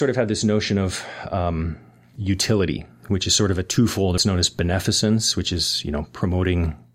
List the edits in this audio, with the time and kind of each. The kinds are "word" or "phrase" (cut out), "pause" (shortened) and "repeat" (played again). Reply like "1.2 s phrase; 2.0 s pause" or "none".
4.2 s phrase